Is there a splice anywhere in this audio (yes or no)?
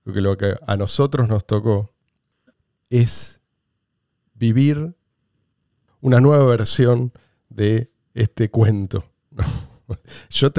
no